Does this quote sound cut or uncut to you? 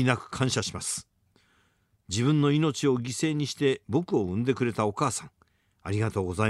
uncut